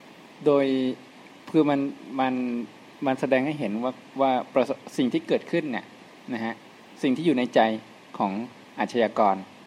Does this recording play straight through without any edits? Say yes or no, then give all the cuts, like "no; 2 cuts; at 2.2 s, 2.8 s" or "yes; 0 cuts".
yes; 0 cuts